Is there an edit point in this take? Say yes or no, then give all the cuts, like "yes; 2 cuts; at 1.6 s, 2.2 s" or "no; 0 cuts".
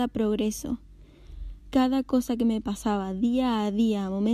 no; 0 cuts